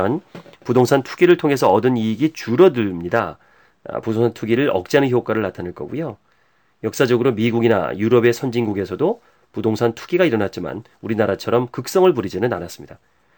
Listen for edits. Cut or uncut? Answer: uncut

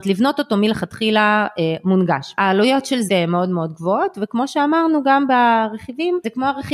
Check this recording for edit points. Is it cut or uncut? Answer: cut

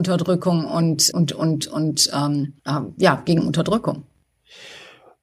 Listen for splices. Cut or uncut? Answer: cut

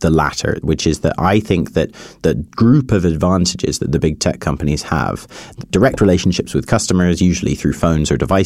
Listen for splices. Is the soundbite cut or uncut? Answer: uncut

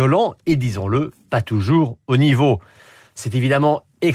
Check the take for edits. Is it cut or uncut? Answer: uncut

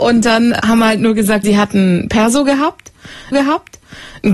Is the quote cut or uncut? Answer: cut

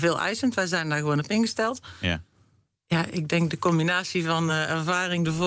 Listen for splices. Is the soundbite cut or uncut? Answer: uncut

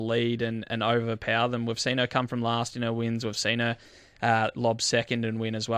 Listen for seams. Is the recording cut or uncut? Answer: uncut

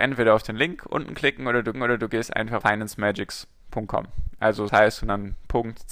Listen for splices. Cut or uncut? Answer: cut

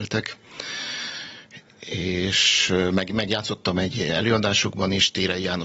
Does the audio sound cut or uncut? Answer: uncut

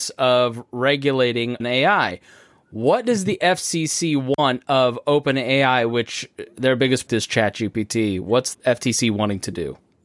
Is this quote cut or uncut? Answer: cut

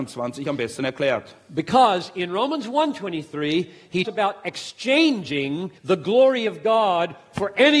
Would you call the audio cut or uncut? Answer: cut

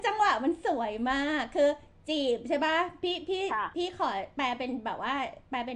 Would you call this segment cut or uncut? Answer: uncut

